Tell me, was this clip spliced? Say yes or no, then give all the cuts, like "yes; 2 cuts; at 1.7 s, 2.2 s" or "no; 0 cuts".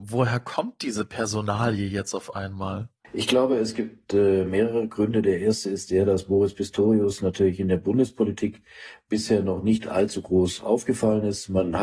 no; 0 cuts